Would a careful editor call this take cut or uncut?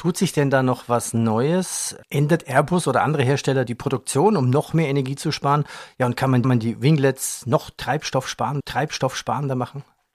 cut